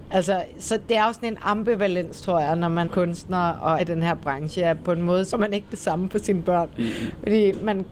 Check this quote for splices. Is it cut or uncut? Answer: cut